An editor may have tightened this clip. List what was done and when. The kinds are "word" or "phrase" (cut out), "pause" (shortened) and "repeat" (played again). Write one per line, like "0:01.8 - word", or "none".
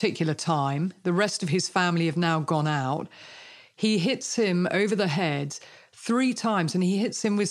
none